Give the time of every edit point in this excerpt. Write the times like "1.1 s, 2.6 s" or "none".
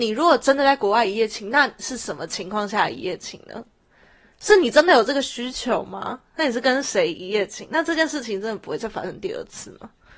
none